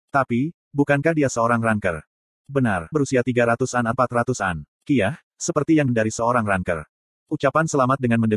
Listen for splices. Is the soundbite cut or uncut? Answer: cut